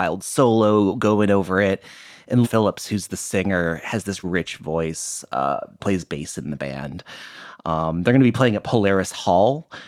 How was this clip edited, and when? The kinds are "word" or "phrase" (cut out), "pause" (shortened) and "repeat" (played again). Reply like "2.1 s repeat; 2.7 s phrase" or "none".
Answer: 2.4 s word; 4.2 s word; 5.8 s word